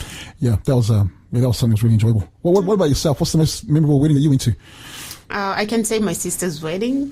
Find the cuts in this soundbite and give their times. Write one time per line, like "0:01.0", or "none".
none